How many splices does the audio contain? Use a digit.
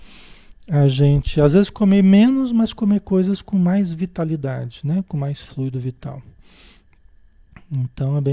0